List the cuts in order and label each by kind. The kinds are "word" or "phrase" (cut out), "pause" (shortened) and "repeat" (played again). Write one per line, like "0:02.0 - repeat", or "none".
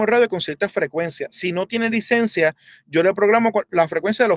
none